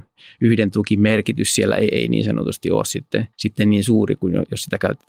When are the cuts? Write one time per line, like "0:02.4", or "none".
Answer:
0:03.3

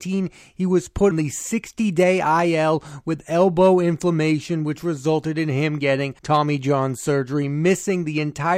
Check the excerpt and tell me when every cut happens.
0:01.1
0:06.2

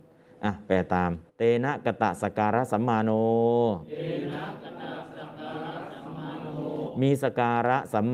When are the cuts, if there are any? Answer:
0:01.2

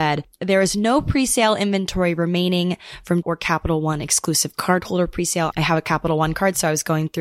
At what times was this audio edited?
0:03.2

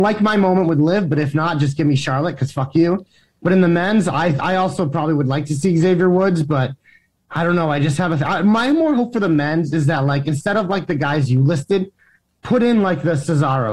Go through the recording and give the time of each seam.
none

